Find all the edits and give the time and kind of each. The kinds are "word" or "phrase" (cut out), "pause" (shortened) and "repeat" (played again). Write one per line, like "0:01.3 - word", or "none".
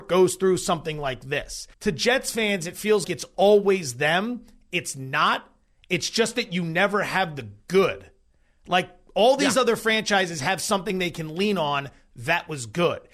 0:01.7 - pause
0:03.0 - word